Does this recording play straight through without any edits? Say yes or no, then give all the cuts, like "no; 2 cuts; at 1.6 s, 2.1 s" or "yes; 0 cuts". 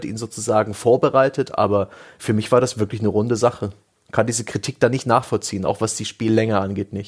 yes; 0 cuts